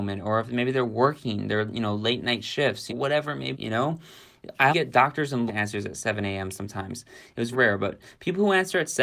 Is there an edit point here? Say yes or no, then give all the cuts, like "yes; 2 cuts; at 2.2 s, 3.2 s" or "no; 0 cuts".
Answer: yes; 5 cuts; at 2.9 s, 3.5 s, 4.7 s, 5.5 s, 7.5 s